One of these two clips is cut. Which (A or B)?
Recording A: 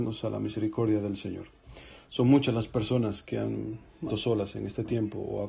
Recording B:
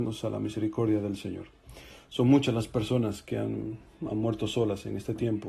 A